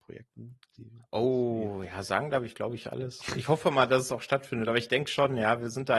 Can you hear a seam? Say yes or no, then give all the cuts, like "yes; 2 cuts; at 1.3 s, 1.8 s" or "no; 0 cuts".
no; 0 cuts